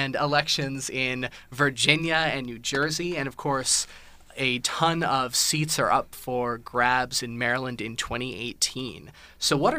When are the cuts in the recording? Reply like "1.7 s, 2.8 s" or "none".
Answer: none

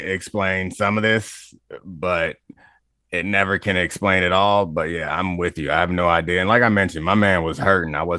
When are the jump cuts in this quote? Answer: none

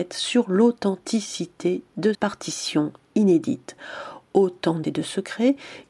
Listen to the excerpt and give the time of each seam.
2.1 s, 4.8 s

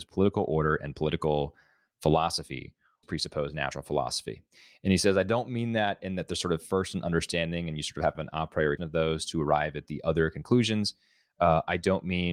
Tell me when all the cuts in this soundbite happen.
3.0 s, 8.2 s, 8.8 s

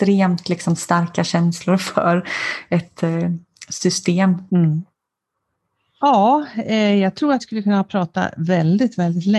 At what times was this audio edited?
4.5 s, 7.4 s

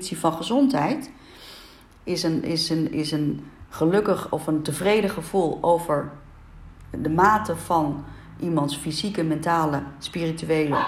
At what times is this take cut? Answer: none

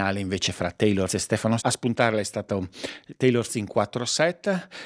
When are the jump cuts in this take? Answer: 1.1 s, 1.6 s, 3.5 s

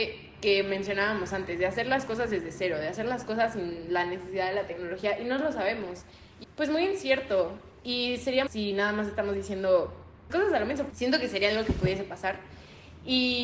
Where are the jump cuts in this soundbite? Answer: 6.4 s, 8.5 s, 10.3 s, 10.9 s

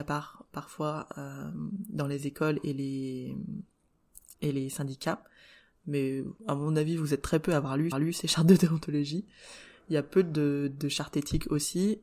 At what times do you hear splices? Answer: 4.3 s, 6.4 s, 7.9 s

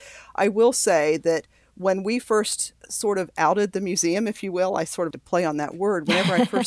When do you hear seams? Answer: 5.1 s

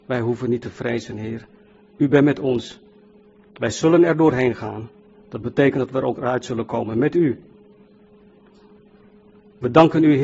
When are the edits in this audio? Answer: none

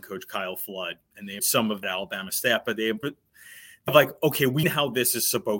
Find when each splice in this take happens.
1.4 s, 1.8 s, 3.0 s, 3.9 s, 4.6 s

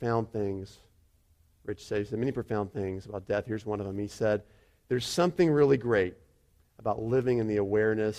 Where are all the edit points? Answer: none

